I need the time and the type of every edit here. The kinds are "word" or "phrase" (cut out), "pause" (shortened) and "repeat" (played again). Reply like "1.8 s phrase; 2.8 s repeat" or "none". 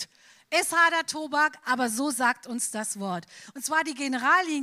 none